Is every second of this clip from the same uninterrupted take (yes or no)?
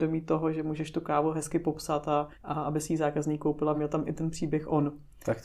no